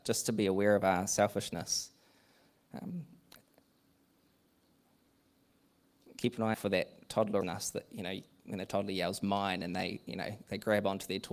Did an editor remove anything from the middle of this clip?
yes; 2 cuts; at 6.5 s, 7.4 s

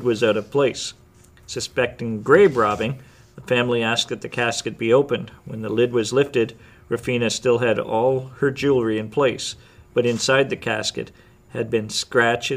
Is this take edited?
no; 0 cuts

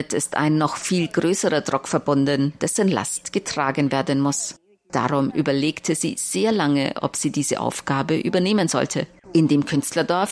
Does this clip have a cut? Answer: no; 0 cuts

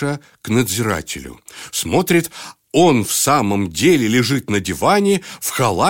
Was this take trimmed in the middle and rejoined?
no; 0 cuts

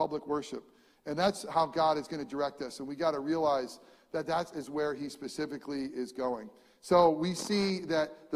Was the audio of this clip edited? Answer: no; 0 cuts

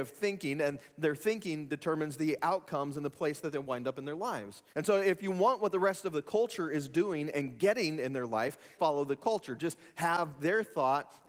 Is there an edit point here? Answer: yes; 3 cuts; at 1.7 s, 4.7 s, 8.8 s

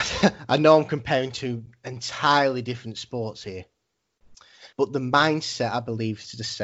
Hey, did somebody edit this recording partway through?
yes; 1 cut; at 4.7 s

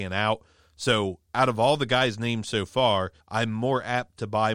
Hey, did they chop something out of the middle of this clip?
yes; 1 cut; at 3.2 s

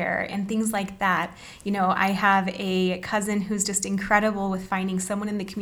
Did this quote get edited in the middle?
no; 0 cuts

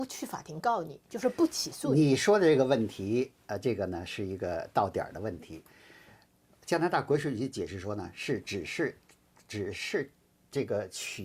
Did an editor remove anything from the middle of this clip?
no; 0 cuts

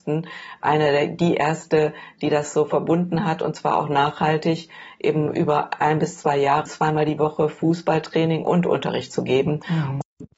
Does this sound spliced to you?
yes; 1 cut; at 6.6 s

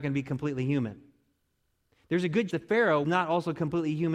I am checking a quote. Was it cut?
yes; 2 cuts; at 2.5 s, 3.0 s

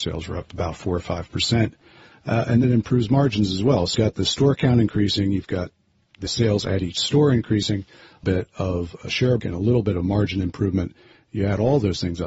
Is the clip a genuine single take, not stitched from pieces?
no; 5 cuts; at 2.6 s, 3.9 s, 6.3 s, 8.2 s, 9.4 s

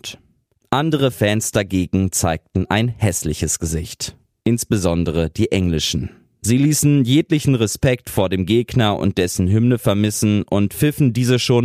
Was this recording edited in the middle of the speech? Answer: no; 0 cuts

